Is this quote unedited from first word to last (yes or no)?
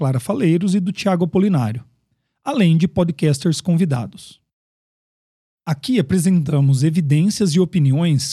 yes